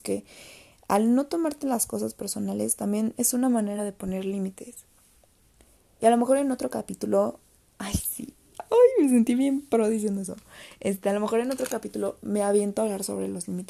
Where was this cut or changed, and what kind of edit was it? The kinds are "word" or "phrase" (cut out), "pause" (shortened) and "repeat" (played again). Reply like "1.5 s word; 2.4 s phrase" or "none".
none